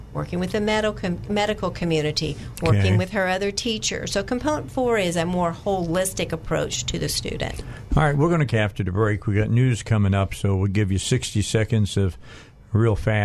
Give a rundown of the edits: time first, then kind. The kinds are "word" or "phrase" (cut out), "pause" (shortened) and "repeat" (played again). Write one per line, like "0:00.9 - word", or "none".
0:08.5 - phrase